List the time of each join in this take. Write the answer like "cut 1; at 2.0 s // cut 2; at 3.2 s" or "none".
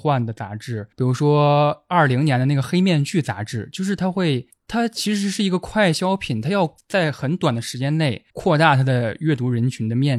cut 1; at 0.9 s // cut 2; at 8.3 s